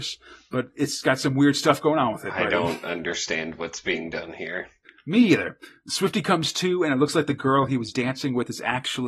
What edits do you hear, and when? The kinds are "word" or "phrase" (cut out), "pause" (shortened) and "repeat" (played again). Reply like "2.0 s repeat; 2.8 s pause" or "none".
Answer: none